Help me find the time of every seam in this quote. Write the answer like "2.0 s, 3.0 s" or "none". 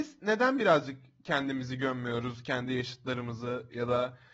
none